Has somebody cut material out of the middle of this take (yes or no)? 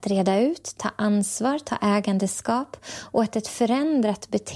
no